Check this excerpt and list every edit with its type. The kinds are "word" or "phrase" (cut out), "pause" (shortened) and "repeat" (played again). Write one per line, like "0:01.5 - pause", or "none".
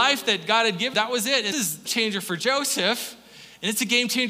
0:00.9 - word
0:01.5 - word
0:01.9 - word